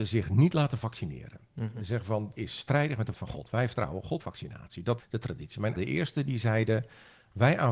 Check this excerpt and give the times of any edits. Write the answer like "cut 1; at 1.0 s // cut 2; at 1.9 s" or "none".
cut 1; at 2.3 s // cut 2; at 3.1 s // cut 3; at 4.2 s // cut 4; at 5.0 s // cut 5; at 5.8 s